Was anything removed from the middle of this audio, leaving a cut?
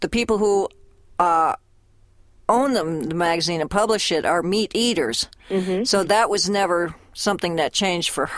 no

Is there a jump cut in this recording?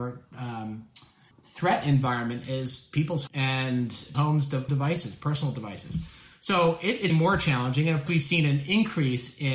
yes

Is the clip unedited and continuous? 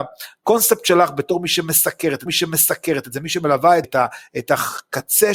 no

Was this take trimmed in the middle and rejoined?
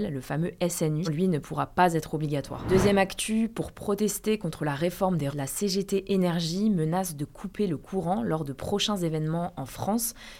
yes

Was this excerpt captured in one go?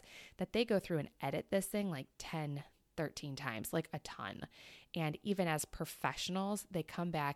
yes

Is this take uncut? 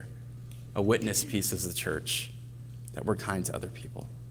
yes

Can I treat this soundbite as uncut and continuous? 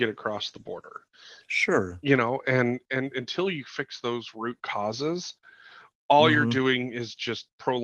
yes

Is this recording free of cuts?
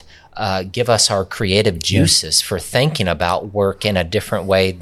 yes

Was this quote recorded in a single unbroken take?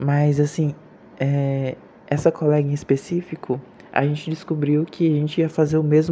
yes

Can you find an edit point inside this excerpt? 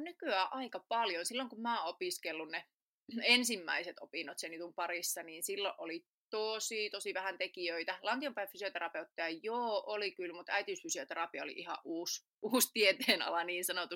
yes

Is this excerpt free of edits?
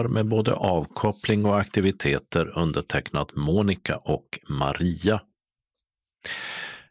yes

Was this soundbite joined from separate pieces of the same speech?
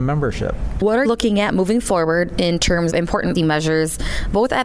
yes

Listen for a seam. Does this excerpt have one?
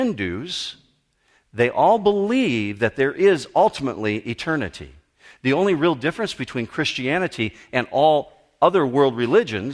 no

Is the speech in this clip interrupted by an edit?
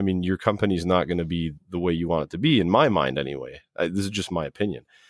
no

